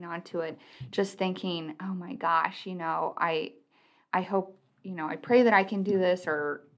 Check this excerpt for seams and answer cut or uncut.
uncut